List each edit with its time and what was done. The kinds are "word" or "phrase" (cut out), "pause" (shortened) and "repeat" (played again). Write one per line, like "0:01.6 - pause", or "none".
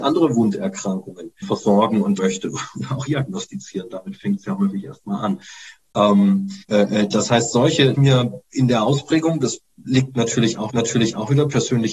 0:01.4 - word
0:02.2 - word
0:03.1 - word
0:06.6 - pause
0:07.9 - phrase
0:10.7 - repeat